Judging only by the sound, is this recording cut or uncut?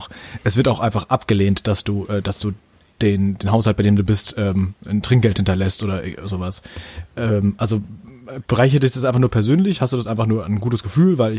uncut